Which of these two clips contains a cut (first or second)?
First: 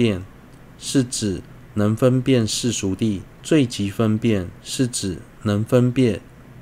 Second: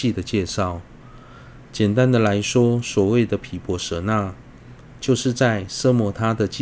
first